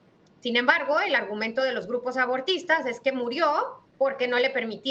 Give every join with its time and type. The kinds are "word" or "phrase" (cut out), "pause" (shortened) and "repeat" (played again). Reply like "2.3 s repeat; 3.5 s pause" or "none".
3.9 s pause